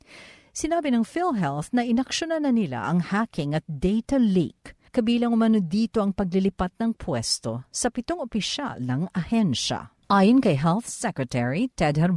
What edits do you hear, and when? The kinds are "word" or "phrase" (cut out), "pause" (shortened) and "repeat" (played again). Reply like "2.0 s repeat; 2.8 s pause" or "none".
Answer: 4.9 s pause; 10.0 s pause